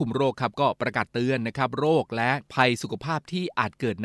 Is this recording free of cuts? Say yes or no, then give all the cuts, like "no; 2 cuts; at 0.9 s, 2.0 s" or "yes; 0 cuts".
no; 1 cut; at 2.5 s